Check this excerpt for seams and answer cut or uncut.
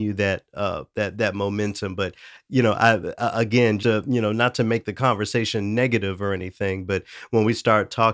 cut